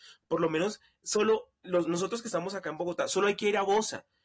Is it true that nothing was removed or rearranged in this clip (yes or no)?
yes